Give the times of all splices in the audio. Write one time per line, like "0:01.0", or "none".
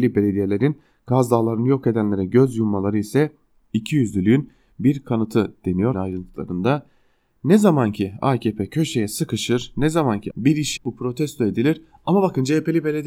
0:05.9
0:10.3
0:10.8